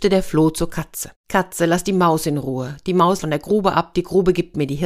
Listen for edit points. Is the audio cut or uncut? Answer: cut